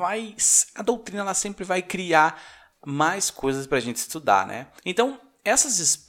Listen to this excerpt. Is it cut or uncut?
cut